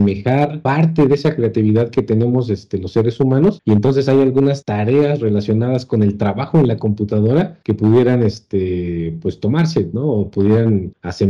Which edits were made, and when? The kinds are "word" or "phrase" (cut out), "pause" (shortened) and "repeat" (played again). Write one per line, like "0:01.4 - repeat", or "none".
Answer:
none